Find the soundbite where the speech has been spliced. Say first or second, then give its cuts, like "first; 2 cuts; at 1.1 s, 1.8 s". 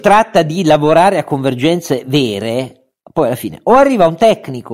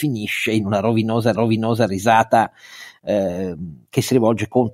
second; 1 cut; at 1.3 s